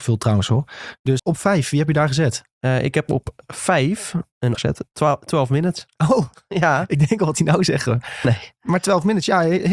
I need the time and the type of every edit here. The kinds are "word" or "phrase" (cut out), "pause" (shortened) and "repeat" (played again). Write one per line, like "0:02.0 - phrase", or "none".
0:01.2 - word
0:04.5 - phrase
0:07.3 - word